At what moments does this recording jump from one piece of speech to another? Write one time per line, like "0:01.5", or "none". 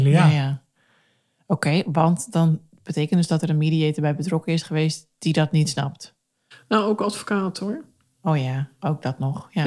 none